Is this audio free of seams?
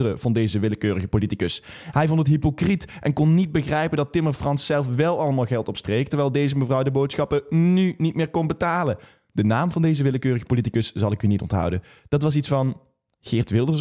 yes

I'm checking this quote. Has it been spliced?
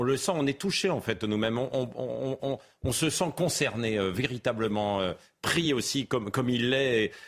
no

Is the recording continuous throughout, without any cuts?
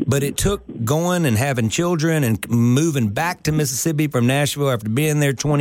yes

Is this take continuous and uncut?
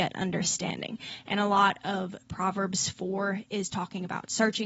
yes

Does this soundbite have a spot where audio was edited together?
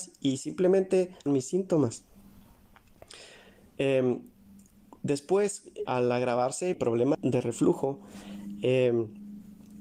yes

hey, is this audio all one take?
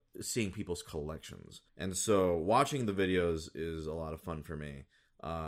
no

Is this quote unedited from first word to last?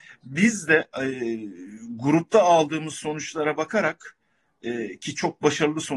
yes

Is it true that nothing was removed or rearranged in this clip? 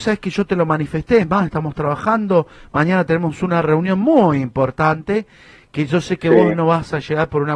yes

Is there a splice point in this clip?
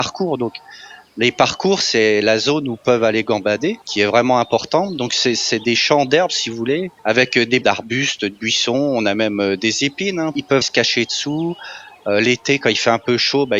yes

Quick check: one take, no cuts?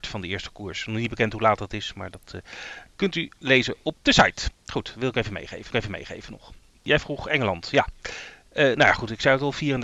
no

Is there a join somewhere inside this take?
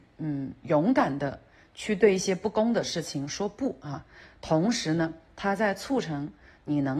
no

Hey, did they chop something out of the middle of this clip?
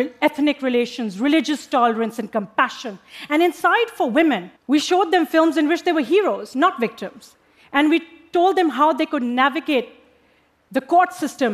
yes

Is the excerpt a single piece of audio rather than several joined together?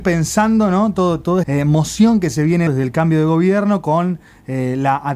no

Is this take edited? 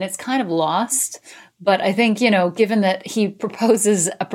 no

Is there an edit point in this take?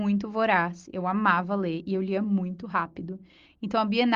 no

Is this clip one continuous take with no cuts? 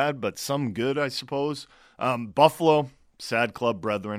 yes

